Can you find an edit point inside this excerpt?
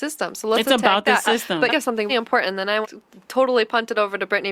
yes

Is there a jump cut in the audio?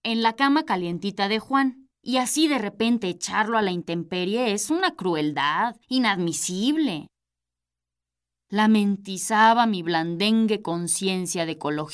yes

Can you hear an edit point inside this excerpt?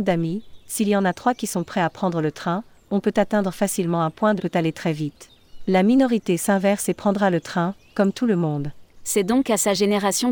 yes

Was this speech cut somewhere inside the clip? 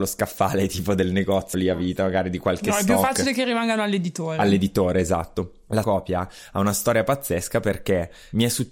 yes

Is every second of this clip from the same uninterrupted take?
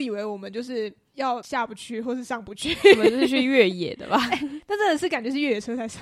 yes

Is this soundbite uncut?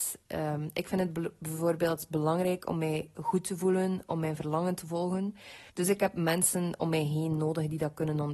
no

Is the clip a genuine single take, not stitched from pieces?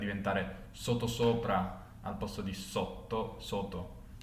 yes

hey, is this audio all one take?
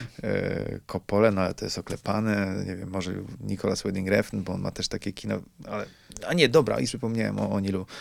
no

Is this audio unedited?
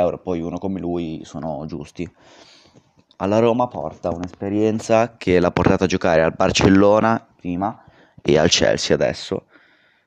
yes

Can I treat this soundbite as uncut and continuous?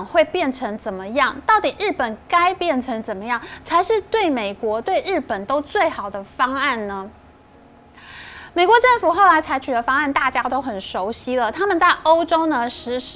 no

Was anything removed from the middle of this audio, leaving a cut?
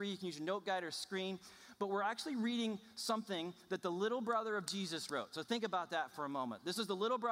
no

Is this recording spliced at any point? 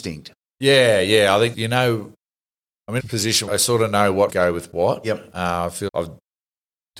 yes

